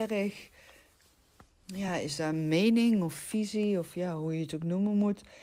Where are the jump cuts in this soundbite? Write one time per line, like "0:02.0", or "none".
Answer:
none